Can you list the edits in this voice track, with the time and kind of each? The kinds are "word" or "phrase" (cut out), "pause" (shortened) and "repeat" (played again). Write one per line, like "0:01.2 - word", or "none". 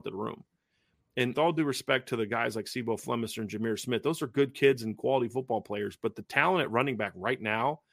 0:01.3 - word